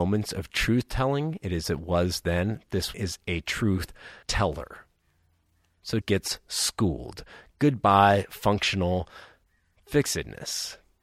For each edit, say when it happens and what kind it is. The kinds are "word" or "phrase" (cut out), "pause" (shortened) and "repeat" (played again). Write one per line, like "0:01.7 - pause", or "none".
0:01.6 - phrase
0:02.9 - word
0:04.2 - pause
0:06.0 - word